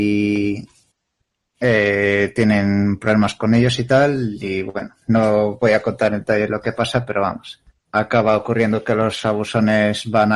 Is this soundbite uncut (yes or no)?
no